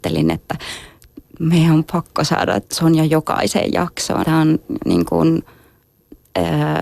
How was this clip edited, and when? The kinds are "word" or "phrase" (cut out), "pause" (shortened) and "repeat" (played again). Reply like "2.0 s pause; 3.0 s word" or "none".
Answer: 2.7 s pause; 4.2 s word

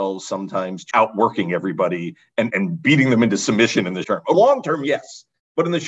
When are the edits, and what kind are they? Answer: 0.9 s word; 2.5 s word; 4.0 s word; 4.3 s word

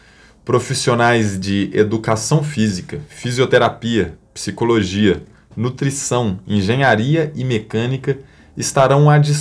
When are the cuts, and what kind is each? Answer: none

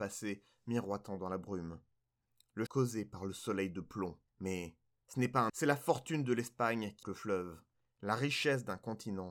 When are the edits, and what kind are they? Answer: 2.7 s word; 4.3 s pause; 5.5 s word; 7.0 s word

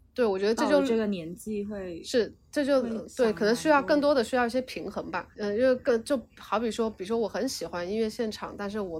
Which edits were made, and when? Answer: 5.3 s pause

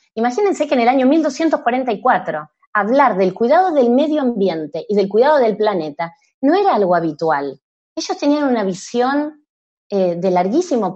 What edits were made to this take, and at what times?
none

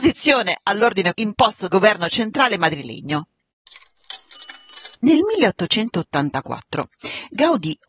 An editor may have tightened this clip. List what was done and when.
1.1 s word; 1.7 s word; 4.9 s pause

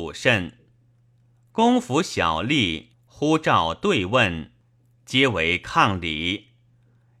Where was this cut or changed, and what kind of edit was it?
2.9 s pause

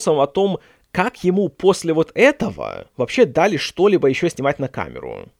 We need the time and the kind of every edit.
none

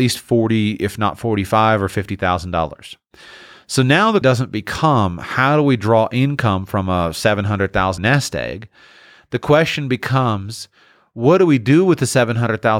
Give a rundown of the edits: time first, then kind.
4.2 s word; 8.0 s word

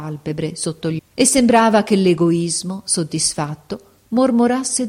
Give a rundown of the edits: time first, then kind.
1.0 s word

